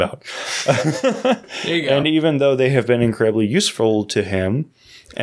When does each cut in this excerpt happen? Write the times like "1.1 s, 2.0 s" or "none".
none